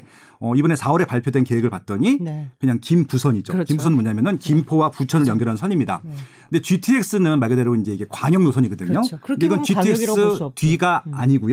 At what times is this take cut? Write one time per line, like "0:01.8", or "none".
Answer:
none